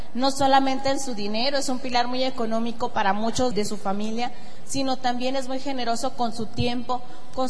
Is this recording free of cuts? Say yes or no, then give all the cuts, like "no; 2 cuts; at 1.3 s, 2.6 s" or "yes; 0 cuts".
no; 1 cut; at 3.5 s